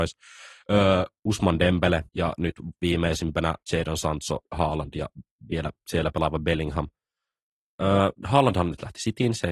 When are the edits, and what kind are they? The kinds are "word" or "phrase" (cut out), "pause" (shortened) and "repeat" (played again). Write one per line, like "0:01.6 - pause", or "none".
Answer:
0:02.1 - pause
0:03.6 - pause
0:04.5 - pause
0:08.1 - pause